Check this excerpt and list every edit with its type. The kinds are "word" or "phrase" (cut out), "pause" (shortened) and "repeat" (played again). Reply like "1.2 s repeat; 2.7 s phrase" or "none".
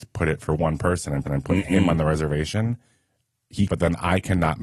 1.2 s repeat; 3.7 s word